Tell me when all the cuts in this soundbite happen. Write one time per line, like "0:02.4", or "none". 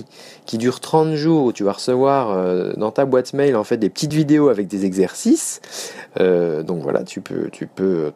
none